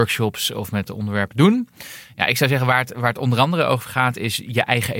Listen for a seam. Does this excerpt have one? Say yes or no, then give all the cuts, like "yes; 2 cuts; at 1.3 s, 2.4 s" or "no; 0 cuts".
no; 0 cuts